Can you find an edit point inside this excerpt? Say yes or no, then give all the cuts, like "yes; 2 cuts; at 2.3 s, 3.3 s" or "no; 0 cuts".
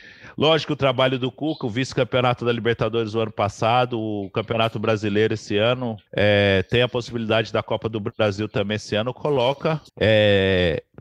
yes; 2 cuts; at 6.1 s, 9.9 s